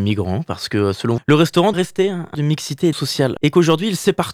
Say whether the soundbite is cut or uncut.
cut